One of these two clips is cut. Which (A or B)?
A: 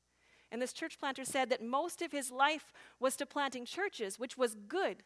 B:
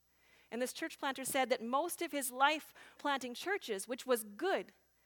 B